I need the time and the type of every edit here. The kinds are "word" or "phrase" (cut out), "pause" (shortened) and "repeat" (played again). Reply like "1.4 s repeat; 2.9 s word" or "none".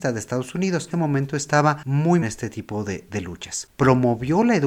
0.9 s phrase; 2.2 s phrase